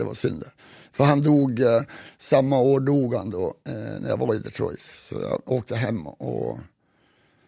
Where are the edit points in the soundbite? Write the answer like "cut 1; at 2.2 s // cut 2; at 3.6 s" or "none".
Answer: none